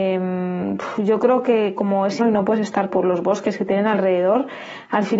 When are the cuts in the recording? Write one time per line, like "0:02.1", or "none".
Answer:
0:02.2
0:02.9